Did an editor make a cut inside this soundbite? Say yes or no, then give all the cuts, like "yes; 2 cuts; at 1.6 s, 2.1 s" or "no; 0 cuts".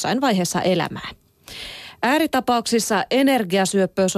no; 0 cuts